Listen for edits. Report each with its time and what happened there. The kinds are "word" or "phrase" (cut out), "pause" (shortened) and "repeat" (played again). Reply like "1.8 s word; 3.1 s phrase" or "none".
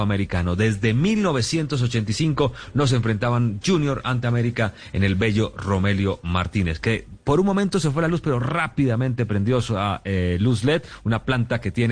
none